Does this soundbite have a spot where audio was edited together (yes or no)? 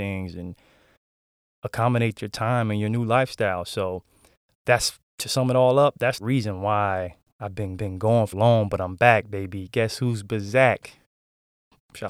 yes